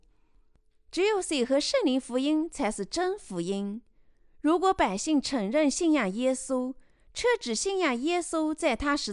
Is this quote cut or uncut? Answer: uncut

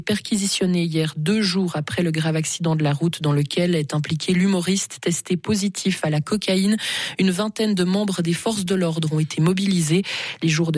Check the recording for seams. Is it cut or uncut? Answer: uncut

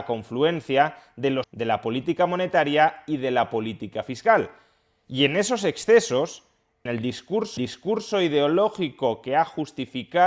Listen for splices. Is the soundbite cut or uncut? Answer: cut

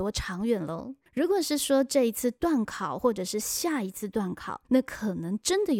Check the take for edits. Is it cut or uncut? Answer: cut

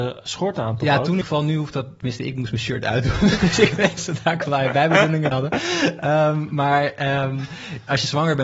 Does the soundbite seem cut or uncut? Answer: cut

